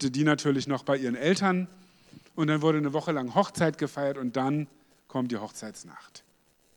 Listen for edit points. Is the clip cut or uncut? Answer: uncut